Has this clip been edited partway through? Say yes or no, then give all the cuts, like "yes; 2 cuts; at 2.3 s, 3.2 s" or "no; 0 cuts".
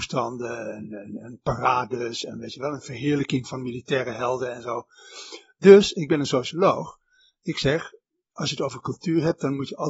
no; 0 cuts